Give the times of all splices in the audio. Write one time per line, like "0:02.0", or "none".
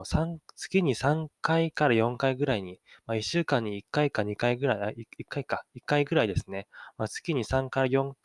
none

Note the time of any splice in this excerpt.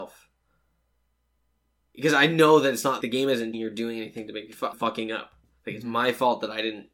0:03.0
0:03.5
0:04.7

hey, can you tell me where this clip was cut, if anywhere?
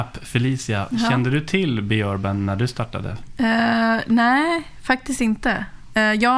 none

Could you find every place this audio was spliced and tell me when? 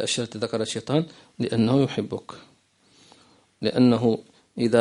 none

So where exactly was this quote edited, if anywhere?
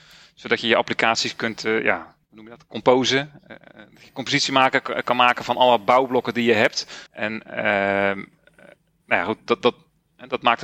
0:02.2
0:07.1

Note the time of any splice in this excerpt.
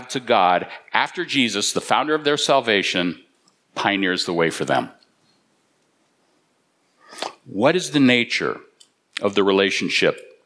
none

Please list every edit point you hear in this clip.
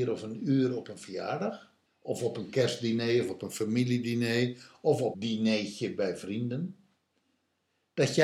0:01.9
0:05.1

